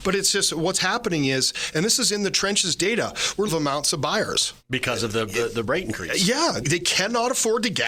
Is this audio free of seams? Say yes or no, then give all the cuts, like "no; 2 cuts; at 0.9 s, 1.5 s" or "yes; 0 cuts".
no; 4 cuts; at 3.5 s, 4.6 s, 5.3 s, 6.6 s